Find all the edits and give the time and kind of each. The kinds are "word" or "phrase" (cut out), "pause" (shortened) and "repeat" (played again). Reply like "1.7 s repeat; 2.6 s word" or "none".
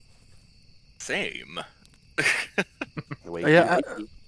3.2 s pause